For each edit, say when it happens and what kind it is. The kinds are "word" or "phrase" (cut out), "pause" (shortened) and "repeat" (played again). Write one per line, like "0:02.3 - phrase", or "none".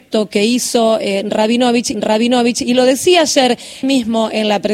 0:01.9 - repeat
0:03.8 - word